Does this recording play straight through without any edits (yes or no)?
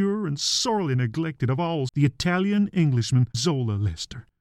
no